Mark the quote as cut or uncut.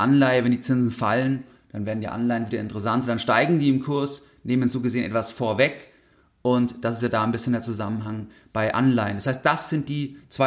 uncut